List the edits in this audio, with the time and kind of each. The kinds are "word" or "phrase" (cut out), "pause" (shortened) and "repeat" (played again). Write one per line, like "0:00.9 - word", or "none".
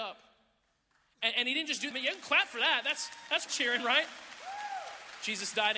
0:01.9 - phrase
0:03.5 - word